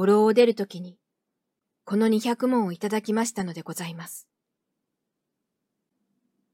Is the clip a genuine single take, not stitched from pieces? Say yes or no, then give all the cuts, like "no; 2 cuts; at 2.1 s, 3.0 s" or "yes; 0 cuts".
yes; 0 cuts